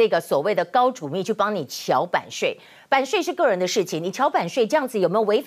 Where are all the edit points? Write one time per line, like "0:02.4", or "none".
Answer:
none